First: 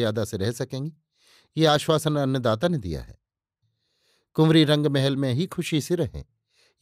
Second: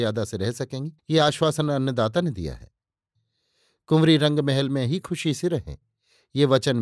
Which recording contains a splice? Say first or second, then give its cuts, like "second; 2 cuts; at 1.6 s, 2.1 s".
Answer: second; 1 cut; at 1.0 s